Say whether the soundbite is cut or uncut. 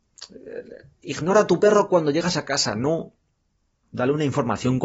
uncut